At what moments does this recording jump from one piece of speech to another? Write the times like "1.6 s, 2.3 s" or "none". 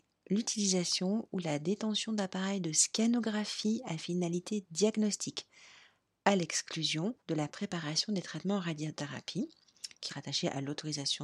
7.2 s, 10.1 s

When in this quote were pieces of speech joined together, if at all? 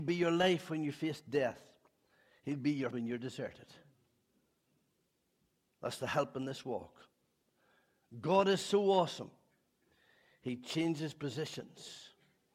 2.9 s

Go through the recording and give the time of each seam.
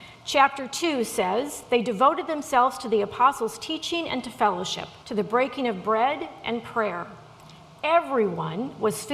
5.0 s

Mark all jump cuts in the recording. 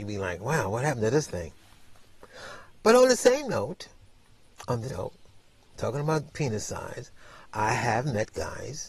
4.9 s

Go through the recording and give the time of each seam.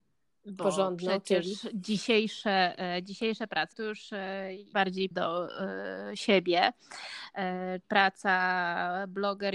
3.7 s, 4.7 s, 5.1 s, 7.8 s

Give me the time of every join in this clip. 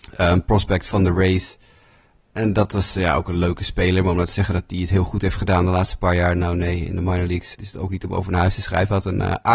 7.5 s

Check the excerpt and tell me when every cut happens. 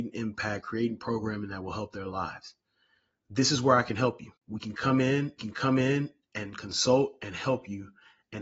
5.4 s

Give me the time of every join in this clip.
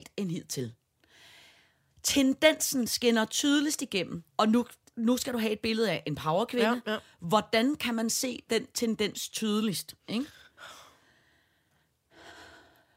4.3 s, 4.8 s, 10.0 s

